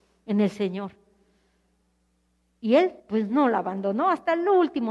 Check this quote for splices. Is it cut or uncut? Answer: cut